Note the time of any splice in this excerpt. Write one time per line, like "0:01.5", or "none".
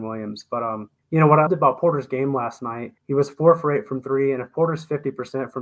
0:01.0
0:01.5
0:03.0